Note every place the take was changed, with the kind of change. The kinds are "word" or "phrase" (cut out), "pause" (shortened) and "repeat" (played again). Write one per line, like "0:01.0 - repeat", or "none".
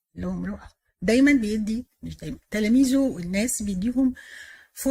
0:02.4 - pause